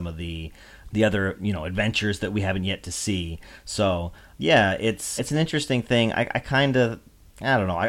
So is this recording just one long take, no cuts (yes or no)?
no